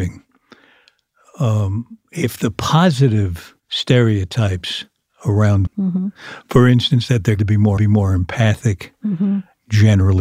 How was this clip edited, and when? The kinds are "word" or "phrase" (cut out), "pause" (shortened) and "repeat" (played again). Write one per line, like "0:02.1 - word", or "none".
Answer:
0:03.6 - pause
0:05.7 - word
0:07.4 - word
0:07.8 - repeat